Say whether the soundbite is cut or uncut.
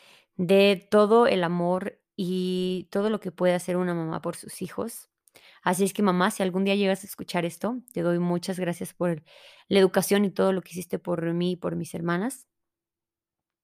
uncut